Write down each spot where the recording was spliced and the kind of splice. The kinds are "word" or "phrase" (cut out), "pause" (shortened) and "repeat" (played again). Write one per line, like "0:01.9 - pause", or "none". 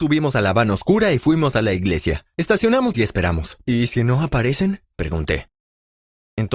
0:02.9 - phrase

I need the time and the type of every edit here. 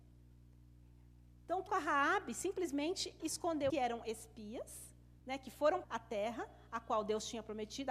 0:01.7 - word
0:03.2 - word
0:03.7 - phrase
0:05.2 - pause
0:05.8 - phrase

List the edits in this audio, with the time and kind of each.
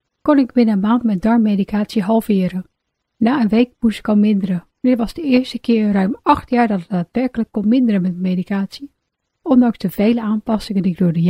none

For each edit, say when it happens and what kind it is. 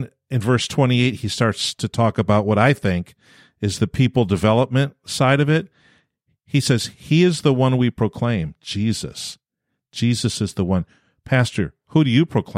none

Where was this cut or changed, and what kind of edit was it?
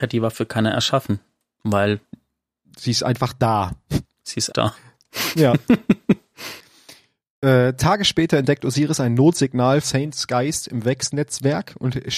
0:04.5 - word
0:09.8 - word

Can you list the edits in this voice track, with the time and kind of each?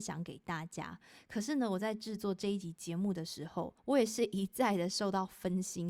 0:03.8 - pause

